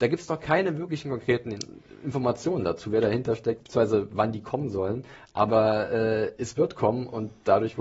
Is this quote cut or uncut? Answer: uncut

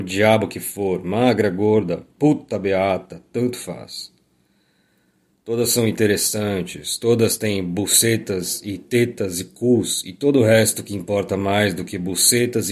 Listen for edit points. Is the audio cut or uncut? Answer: uncut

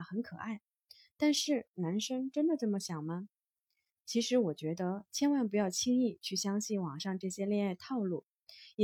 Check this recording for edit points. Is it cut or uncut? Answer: uncut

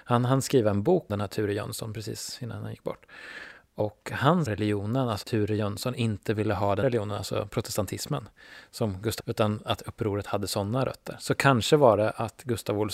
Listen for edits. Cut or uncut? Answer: cut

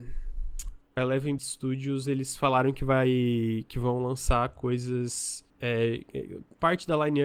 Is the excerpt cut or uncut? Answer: cut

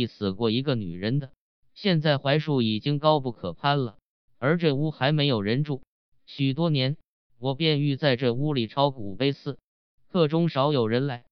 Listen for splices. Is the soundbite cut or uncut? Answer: uncut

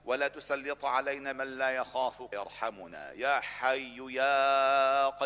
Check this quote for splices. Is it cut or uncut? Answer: cut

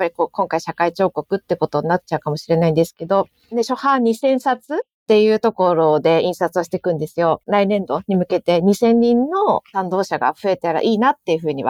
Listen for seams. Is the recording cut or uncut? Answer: uncut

